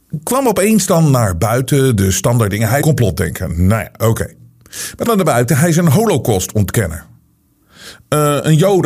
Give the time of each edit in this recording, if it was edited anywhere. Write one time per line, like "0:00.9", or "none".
0:02.8
0:05.1

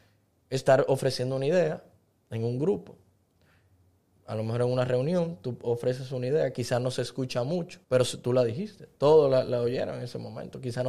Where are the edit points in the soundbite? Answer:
0:07.8

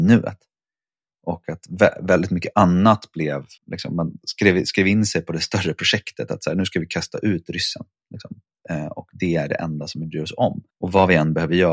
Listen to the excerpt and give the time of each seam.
0:03.6
0:10.7

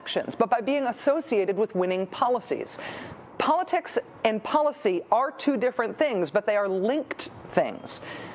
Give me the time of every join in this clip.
none

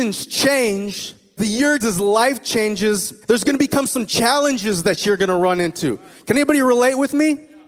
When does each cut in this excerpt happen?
0:01.4
0:01.8
0:03.2

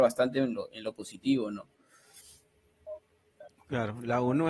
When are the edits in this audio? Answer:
none

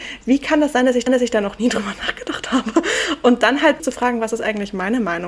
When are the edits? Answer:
0:01.1
0:03.8

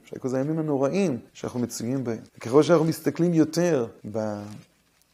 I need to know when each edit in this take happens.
0:01.3
0:02.3
0:04.0

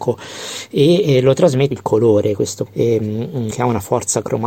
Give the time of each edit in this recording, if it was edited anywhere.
0:01.7
0:02.7
0:03.5

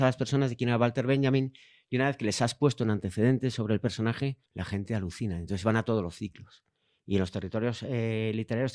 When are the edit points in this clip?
0:04.5

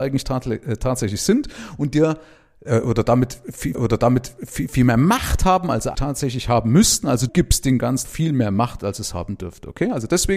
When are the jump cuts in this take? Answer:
0:03.7
0:05.9
0:07.3
0:08.0

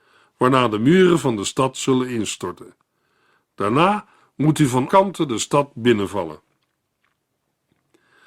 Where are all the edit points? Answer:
0:04.9

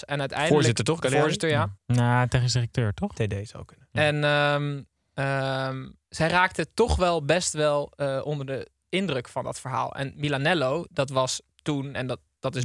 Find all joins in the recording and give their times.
0:01.8
0:06.0

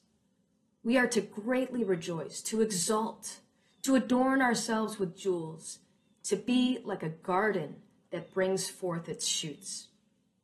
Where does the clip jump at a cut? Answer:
none

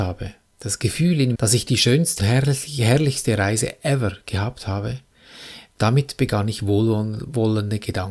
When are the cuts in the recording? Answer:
0:01.4
0:02.2

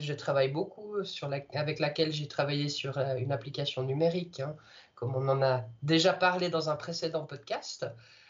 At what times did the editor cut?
none

